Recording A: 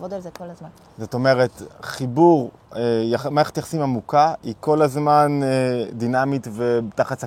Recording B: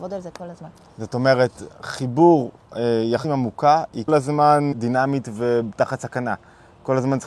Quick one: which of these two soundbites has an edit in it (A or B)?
B